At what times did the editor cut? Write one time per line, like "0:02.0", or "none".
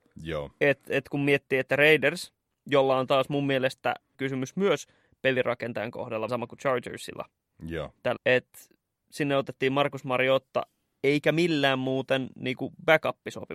0:04.1
0:06.3
0:08.2